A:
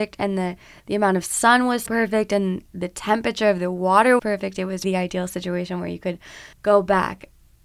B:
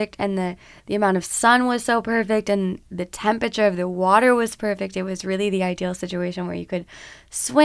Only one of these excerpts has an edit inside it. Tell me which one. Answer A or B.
A